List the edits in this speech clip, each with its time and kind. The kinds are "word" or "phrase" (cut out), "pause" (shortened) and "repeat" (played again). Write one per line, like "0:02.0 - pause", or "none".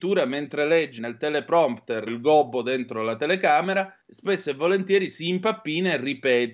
0:01.0 - word
0:02.1 - word
0:04.0 - pause